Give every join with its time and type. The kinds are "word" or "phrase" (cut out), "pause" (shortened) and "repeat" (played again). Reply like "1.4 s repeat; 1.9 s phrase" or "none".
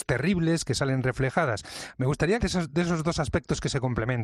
2.4 s word